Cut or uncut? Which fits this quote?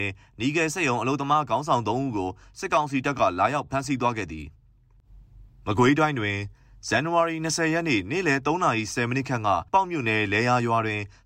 cut